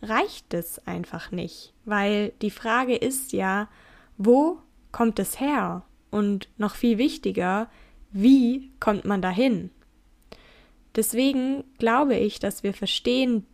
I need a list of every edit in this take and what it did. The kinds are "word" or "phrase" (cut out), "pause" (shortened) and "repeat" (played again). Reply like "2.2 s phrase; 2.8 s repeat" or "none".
none